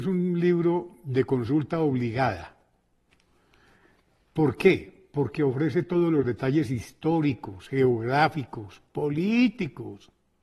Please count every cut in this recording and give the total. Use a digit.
0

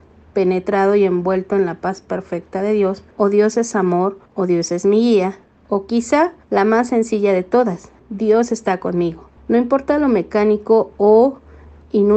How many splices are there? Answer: 6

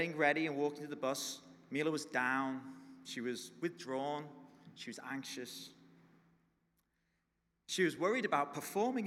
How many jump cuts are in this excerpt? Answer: 0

